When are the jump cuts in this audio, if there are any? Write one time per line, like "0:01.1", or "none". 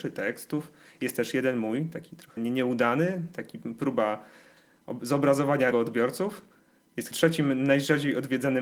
0:02.4
0:05.7
0:07.1